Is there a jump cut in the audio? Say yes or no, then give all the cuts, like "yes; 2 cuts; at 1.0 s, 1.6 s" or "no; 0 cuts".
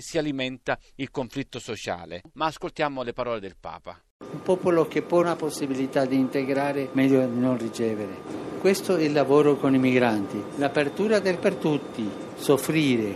yes; 2 cuts; at 5.2 s, 11.4 s